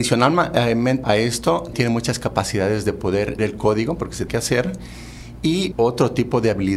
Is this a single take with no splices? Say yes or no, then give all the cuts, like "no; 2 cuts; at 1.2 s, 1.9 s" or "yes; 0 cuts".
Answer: no; 5 cuts; at 1.0 s, 1.7 s, 3.4 s, 4.3 s, 5.7 s